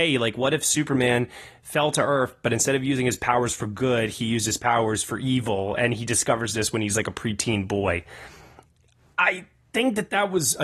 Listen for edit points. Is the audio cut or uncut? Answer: uncut